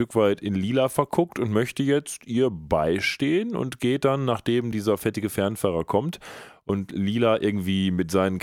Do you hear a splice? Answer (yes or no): no